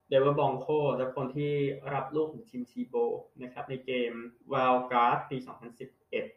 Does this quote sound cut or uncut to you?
cut